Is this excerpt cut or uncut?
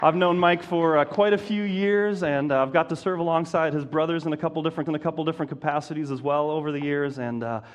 cut